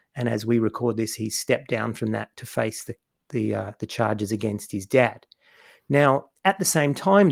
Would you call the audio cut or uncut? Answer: uncut